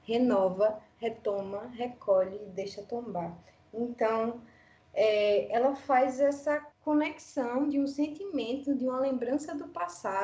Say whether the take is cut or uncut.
cut